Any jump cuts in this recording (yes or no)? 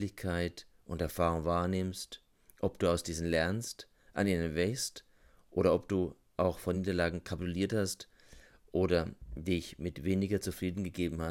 no